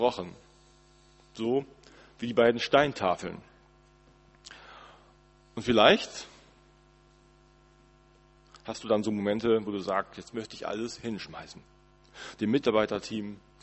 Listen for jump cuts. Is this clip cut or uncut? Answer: uncut